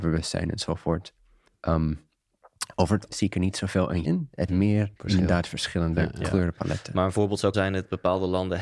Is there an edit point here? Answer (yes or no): yes